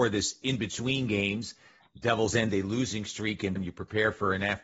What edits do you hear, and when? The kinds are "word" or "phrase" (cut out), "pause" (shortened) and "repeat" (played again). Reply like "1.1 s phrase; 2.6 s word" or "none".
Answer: 3.6 s word